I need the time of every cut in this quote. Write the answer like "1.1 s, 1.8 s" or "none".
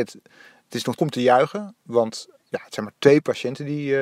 1.0 s